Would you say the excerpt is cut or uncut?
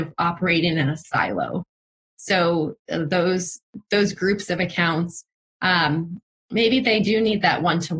uncut